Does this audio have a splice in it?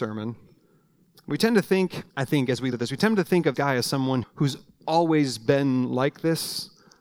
yes; 5 cuts; at 1.0 s, 2.1 s, 2.7 s, 3.5 s, 4.2 s

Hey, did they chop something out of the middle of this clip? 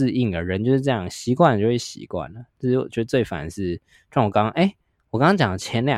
no; 0 cuts

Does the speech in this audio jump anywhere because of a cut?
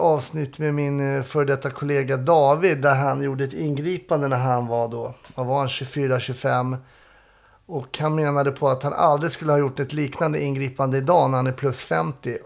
no; 0 cuts

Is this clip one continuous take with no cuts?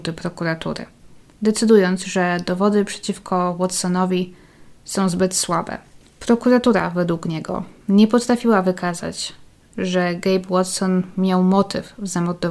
yes; 0 cuts

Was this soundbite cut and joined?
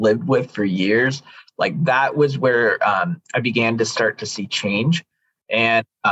no; 0 cuts

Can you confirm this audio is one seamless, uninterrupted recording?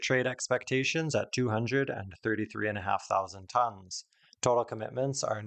yes; 0 cuts

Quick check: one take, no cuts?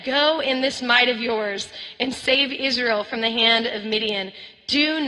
yes; 0 cuts

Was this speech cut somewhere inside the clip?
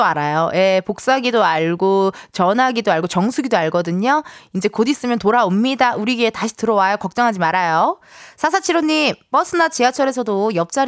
no; 0 cuts

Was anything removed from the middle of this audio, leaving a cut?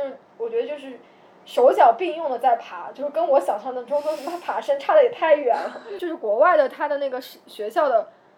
no; 0 cuts

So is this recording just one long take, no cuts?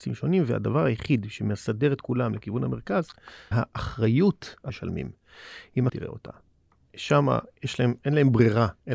no; 3 cuts; at 3.5 s, 4.7 s, 5.9 s

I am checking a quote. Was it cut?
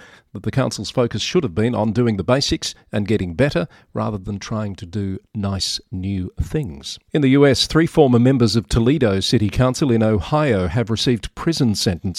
yes; 1 cut; at 7.1 s

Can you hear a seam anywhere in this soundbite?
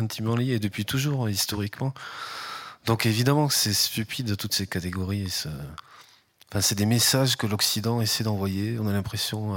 no; 0 cuts

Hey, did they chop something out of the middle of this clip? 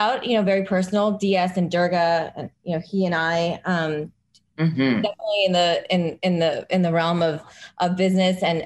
no; 0 cuts

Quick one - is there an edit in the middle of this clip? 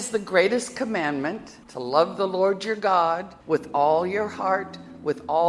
yes; 2 cuts; at 1.6 s, 3.4 s

